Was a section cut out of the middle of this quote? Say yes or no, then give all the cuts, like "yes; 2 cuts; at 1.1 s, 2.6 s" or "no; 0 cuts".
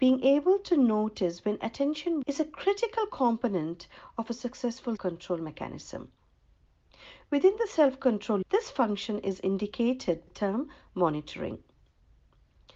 yes; 4 cuts; at 2.2 s, 5.0 s, 8.4 s, 10.3 s